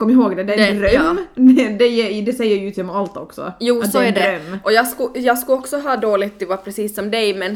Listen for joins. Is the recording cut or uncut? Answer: uncut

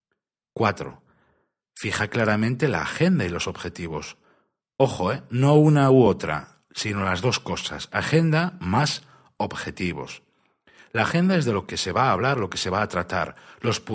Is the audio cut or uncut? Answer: uncut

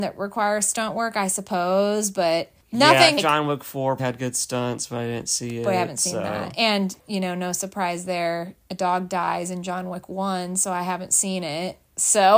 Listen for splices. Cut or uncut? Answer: cut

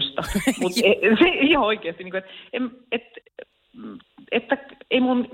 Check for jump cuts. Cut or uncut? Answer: uncut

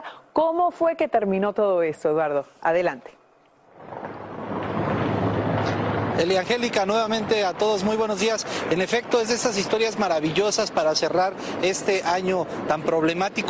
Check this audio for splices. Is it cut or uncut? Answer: uncut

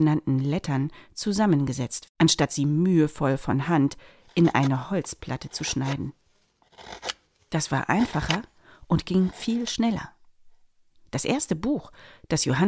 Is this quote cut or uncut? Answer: cut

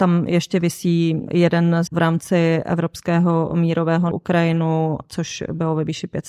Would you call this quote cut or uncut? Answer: cut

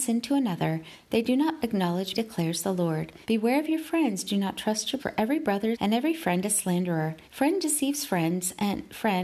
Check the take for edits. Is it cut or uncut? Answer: cut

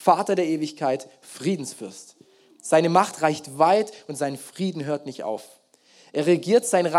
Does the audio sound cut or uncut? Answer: uncut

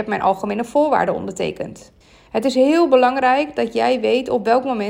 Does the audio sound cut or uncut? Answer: cut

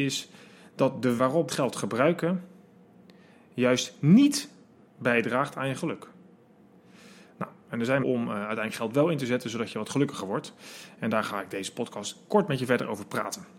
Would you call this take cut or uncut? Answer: cut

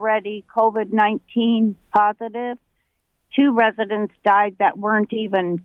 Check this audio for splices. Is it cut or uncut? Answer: cut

